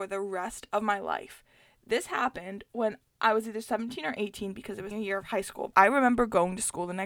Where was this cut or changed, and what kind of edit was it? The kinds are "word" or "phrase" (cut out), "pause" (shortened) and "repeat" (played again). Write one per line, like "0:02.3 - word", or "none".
0:04.9 - word
0:05.7 - word